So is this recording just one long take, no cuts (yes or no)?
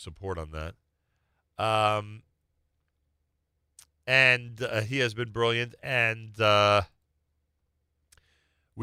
yes